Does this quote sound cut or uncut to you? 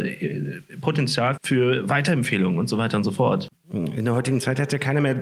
cut